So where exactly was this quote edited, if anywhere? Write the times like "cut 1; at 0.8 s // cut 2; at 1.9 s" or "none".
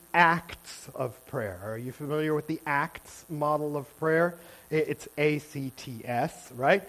cut 1; at 0.9 s

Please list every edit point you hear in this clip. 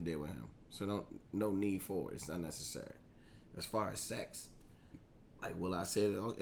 none

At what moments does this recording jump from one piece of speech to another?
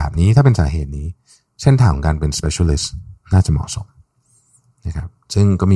none

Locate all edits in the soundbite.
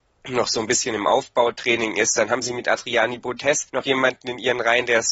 cut 1; at 3.7 s

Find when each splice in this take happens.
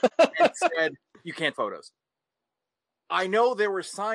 cut 1; at 1.5 s // cut 2; at 3.0 s

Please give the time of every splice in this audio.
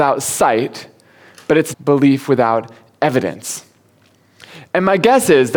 cut 1; at 1.7 s

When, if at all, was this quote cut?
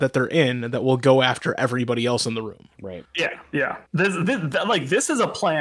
cut 1; at 3.9 s

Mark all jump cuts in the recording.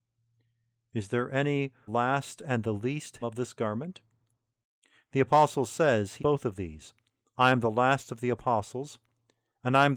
cut 1; at 1.9 s // cut 2; at 3.2 s // cut 3; at 6.2 s

